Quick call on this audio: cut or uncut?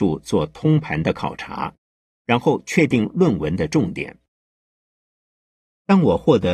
uncut